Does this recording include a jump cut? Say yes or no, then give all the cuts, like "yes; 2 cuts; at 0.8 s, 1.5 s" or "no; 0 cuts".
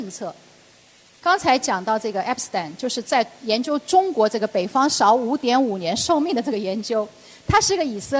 no; 0 cuts